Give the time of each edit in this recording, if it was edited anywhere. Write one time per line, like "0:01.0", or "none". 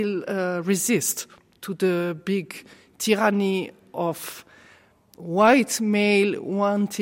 none